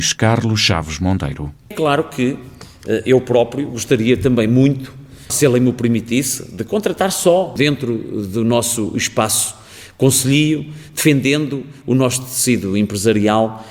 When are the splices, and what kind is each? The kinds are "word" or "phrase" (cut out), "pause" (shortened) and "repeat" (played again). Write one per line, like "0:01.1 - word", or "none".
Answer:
none